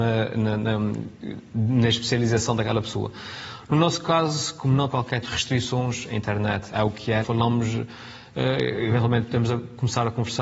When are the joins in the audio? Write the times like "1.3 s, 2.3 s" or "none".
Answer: 4.9 s, 5.2 s, 6.7 s, 7.2 s